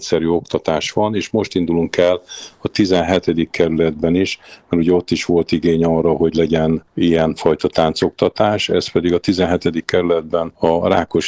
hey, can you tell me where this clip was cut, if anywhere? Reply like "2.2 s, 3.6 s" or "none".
6.9 s